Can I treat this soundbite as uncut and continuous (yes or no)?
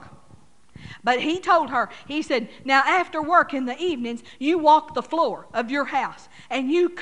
yes